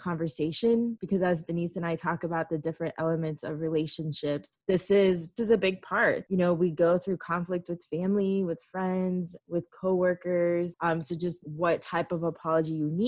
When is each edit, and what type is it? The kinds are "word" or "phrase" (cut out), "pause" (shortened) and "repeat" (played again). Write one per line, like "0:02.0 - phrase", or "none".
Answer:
0:05.4 - word
0:11.4 - word